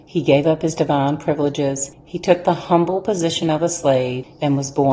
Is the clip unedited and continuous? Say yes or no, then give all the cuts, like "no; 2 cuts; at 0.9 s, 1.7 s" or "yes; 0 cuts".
yes; 0 cuts